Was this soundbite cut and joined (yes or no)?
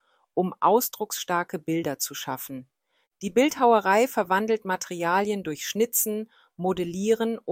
no